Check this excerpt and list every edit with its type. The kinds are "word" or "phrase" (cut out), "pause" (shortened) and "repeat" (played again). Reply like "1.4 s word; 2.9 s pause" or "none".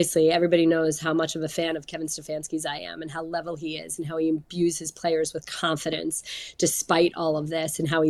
none